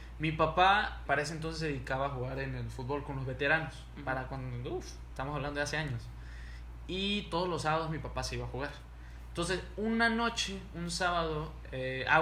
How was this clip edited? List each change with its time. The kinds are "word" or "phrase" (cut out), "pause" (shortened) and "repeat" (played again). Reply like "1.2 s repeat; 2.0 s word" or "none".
1.1 s word